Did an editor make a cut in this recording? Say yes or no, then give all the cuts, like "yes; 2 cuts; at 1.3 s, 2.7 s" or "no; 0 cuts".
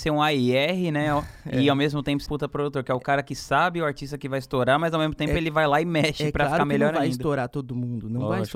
yes; 1 cut; at 2.3 s